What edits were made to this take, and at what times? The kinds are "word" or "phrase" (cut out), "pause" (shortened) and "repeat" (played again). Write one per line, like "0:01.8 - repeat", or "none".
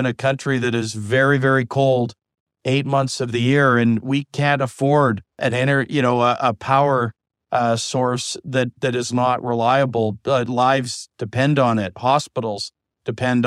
0:05.3 - pause